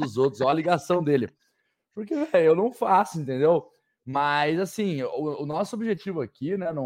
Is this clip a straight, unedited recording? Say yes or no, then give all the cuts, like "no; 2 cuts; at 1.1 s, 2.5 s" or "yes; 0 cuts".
yes; 0 cuts